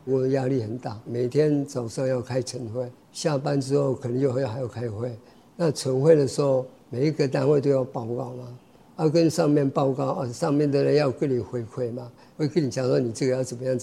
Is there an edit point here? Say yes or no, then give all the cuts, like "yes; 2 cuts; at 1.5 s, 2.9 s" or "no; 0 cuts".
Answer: no; 0 cuts